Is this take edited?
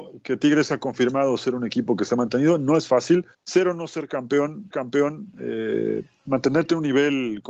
yes; 2 cuts; at 3.3 s, 4.7 s

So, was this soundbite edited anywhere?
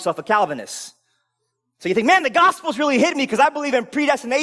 no; 0 cuts

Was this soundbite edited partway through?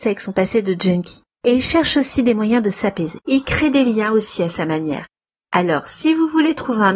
no; 0 cuts

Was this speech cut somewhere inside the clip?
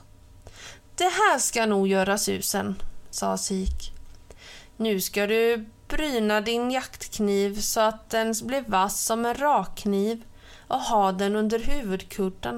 no; 0 cuts

